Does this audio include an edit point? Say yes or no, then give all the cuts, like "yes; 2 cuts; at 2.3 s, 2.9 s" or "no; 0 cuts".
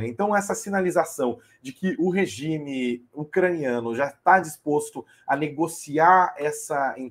no; 0 cuts